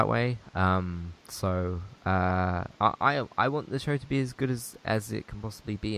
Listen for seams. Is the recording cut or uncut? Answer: cut